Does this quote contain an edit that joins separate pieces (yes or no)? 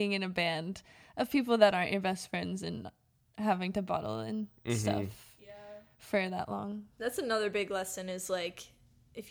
no